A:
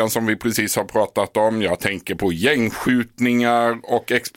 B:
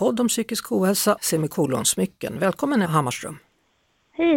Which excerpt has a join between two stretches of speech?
B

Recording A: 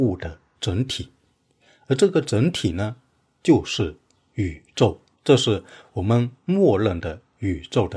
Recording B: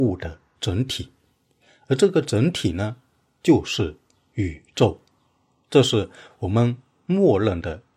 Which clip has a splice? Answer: A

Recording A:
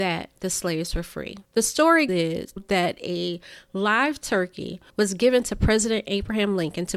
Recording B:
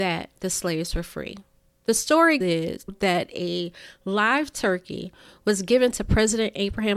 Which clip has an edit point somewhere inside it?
A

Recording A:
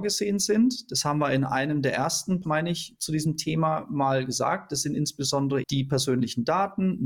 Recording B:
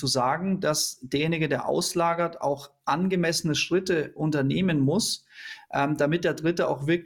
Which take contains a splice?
A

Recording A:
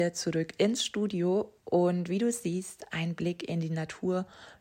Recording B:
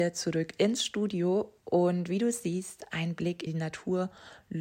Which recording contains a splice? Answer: B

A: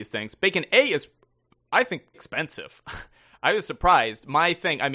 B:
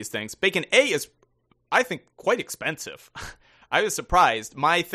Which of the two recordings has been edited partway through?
A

